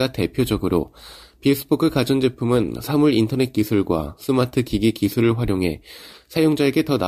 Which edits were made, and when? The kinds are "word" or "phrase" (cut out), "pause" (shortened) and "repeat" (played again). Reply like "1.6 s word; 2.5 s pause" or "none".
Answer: none